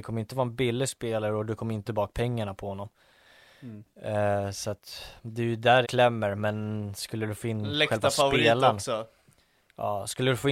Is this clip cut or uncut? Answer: cut